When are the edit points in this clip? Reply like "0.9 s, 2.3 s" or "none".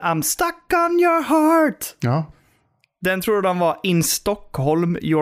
none